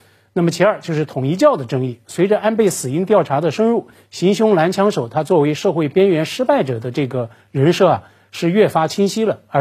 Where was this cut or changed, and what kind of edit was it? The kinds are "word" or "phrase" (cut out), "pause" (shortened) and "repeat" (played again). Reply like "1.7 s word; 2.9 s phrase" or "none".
none